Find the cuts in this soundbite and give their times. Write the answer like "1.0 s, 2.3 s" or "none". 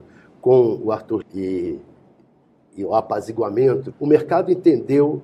1.2 s, 3.9 s